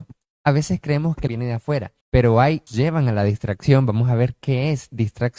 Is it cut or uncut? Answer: cut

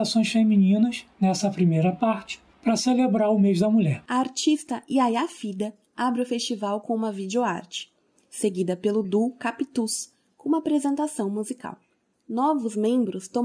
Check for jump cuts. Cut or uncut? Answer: uncut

